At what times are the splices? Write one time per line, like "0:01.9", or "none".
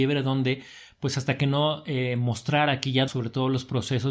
0:03.1